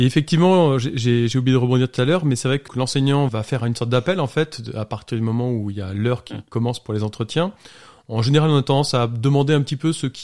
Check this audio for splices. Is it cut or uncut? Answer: cut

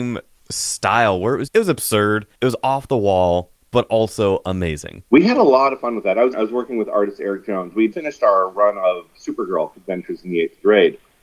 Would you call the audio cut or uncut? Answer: cut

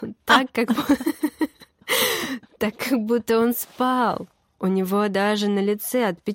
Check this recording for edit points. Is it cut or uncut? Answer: uncut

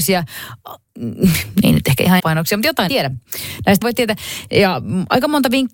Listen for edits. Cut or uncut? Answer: cut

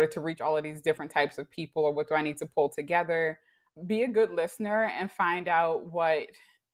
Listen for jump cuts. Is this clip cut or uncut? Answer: uncut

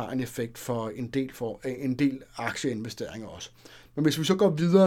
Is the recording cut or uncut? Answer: uncut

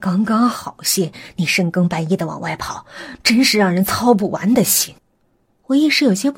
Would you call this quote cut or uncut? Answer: cut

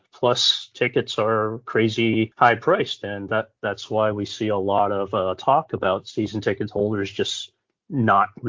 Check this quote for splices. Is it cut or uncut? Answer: uncut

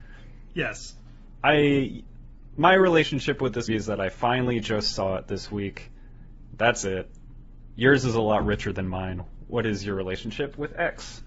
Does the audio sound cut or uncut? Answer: cut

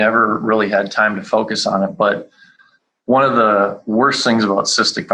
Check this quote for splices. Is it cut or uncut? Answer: uncut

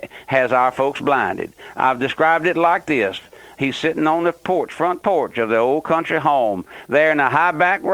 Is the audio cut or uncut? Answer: uncut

